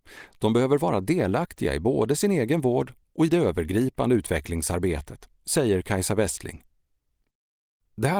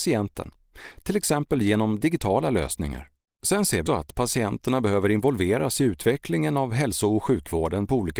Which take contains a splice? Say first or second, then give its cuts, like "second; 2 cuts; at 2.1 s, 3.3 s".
second; 2 cuts; at 3.3 s, 3.9 s